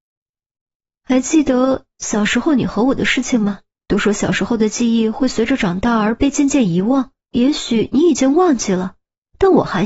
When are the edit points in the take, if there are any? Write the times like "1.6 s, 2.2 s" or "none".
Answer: 3.7 s, 7.2 s